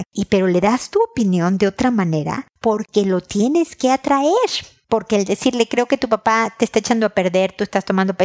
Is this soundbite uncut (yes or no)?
yes